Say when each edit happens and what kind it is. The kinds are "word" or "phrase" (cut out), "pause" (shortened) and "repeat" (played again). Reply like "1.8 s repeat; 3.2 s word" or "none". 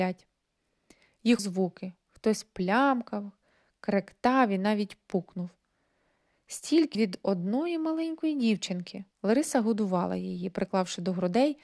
1.4 s phrase; 6.9 s word; 9.1 s pause